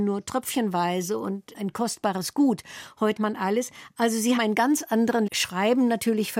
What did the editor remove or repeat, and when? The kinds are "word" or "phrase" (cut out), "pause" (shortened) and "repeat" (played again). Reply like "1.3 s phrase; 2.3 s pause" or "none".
1.5 s word; 3.2 s word; 4.4 s word; 5.3 s phrase